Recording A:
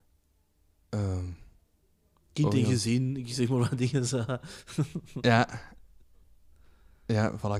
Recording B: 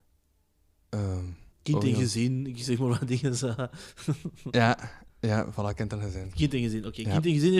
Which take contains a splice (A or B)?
B